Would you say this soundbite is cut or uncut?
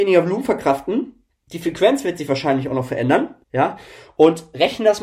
cut